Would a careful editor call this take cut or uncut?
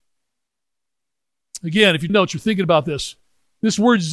cut